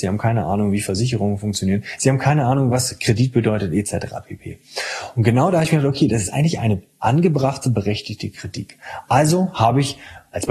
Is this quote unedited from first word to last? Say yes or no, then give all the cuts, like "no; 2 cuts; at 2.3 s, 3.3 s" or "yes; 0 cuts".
yes; 0 cuts